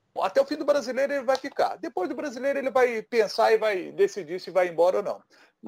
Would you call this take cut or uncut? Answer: uncut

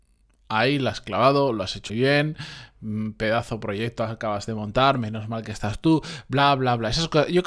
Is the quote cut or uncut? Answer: cut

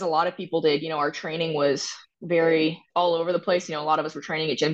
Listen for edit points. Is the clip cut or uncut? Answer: uncut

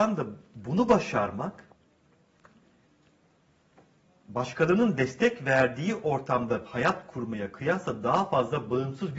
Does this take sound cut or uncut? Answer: uncut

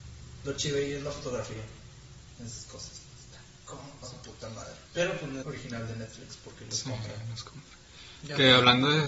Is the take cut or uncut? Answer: cut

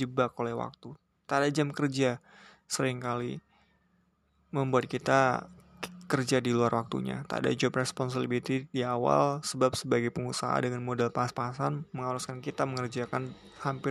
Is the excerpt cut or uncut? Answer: uncut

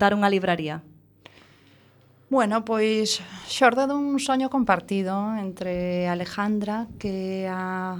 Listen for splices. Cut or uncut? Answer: uncut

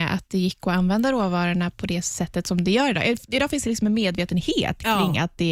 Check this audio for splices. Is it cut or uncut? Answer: uncut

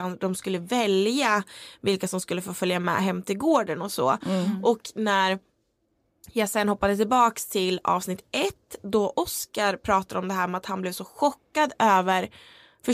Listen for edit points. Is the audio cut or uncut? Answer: uncut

